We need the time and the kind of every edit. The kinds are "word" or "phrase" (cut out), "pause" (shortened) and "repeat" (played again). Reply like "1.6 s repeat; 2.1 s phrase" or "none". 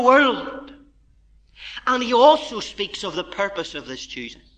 none